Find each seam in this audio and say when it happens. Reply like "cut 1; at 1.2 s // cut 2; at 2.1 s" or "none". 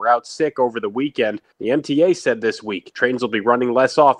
cut 1; at 1.5 s